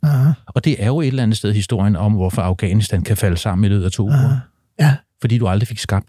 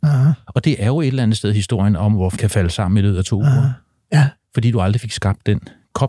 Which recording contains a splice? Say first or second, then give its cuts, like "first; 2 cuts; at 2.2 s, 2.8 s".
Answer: second; 1 cut; at 2.4 s